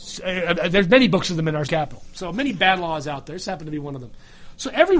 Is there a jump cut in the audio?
yes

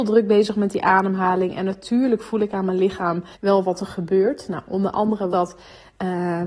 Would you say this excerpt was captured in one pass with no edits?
no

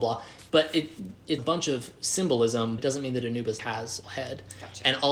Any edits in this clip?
yes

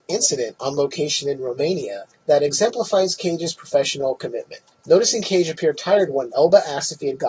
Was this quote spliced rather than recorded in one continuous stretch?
yes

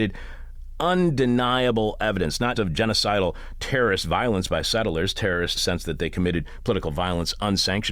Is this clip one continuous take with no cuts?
no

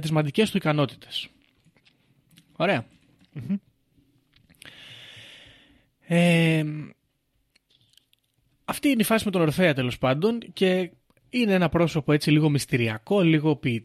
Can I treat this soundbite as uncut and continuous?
yes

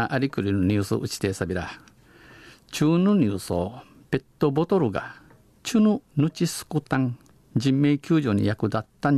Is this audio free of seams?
yes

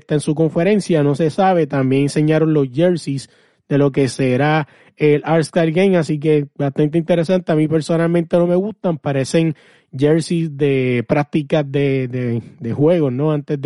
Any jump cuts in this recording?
no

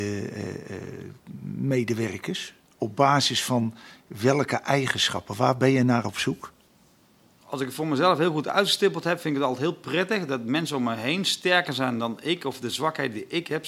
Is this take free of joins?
yes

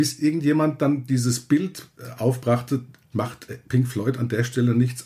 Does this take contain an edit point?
yes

